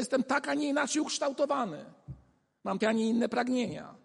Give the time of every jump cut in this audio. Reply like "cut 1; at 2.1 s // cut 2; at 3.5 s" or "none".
cut 1; at 2.8 s